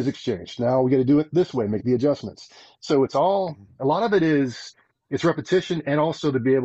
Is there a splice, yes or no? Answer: no